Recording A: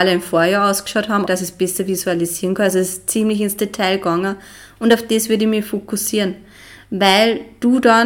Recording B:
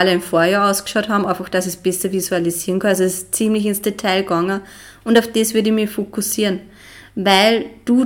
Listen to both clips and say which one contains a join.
A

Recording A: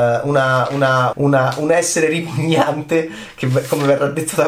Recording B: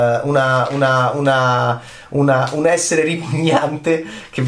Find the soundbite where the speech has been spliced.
A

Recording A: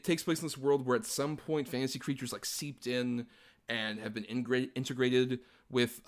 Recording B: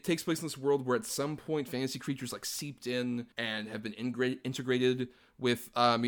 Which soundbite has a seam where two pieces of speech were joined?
B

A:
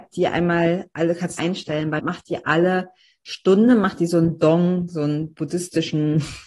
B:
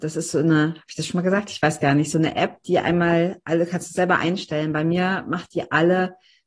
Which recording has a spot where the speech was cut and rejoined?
A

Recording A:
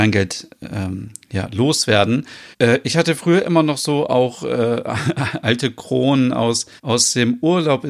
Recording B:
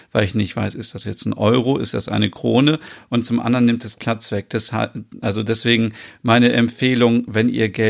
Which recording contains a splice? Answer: A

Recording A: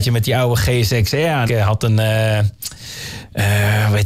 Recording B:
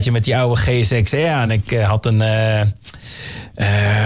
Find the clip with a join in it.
A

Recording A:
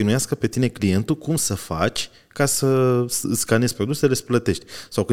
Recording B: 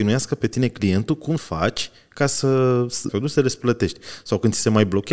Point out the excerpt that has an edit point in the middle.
B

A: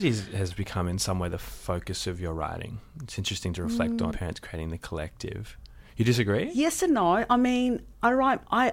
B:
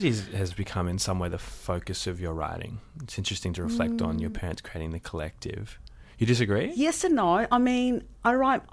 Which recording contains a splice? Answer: A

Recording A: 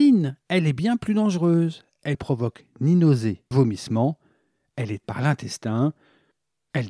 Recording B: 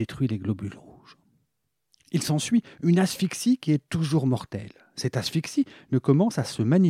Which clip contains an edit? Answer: A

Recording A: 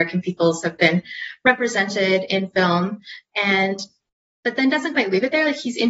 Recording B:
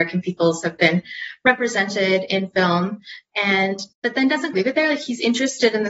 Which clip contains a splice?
B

